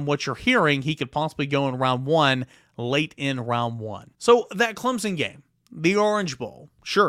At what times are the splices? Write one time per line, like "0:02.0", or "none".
0:04.2

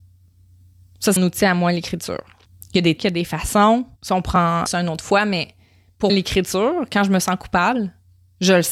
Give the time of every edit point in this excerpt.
0:01.2
0:02.5
0:03.0
0:04.0
0:04.7
0:06.1

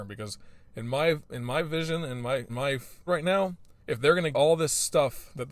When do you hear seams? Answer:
0:02.5
0:03.1
0:03.8
0:04.3

